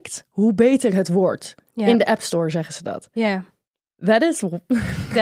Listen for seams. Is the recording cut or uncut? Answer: uncut